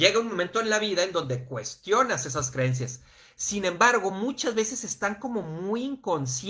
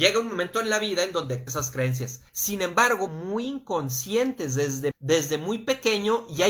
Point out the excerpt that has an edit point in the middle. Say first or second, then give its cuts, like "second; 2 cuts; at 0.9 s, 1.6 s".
second; 4 cuts; at 1.5 s, 2.3 s, 3.1 s, 4.9 s